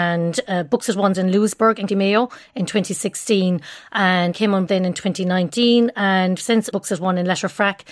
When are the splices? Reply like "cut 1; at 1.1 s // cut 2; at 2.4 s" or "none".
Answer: cut 1; at 1.1 s // cut 2; at 1.9 s // cut 3; at 4.3 s // cut 4; at 4.7 s // cut 5; at 6.4 s // cut 6; at 6.7 s

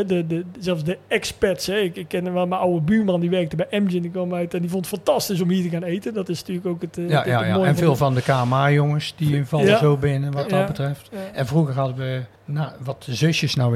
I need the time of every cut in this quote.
cut 1; at 12.4 s

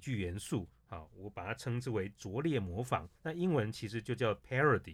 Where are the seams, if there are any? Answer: cut 1; at 3.2 s

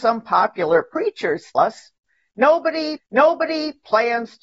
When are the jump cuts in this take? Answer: cut 1; at 1.5 s // cut 2; at 3.0 s

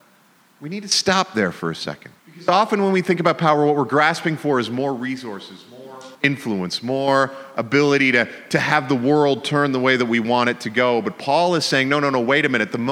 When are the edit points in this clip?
cut 1; at 2.2 s // cut 2; at 6.1 s

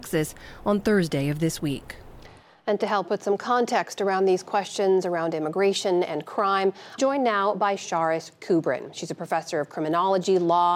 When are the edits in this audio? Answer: cut 1; at 7.0 s

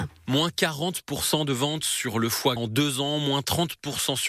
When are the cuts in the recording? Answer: cut 1; at 2.6 s

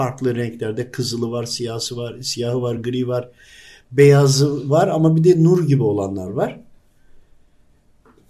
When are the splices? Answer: none

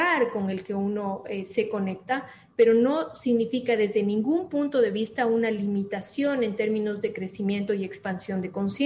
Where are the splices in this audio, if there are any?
none

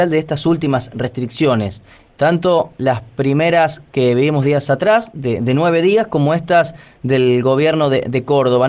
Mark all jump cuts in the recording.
none

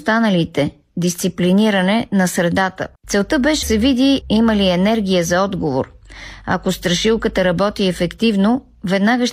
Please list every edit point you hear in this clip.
cut 1; at 2.9 s // cut 2; at 3.6 s // cut 3; at 4.2 s

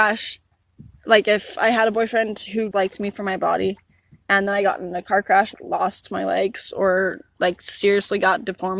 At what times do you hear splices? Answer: cut 1; at 2.7 s // cut 2; at 5.5 s

